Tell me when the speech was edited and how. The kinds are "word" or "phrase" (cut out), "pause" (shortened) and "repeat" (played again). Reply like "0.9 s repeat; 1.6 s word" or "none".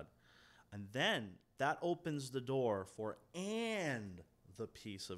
none